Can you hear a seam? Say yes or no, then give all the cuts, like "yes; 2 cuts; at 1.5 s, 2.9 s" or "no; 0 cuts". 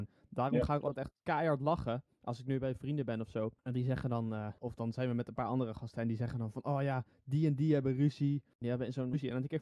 yes; 1 cut; at 1.2 s